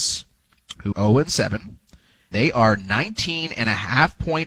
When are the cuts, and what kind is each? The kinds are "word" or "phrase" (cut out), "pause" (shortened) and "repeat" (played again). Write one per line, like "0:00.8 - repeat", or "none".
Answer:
0:00.9 - word
0:02.3 - word